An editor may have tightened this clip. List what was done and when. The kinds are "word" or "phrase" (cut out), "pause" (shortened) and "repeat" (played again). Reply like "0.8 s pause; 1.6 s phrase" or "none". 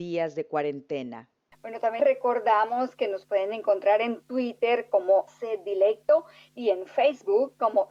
2.0 s word; 5.3 s word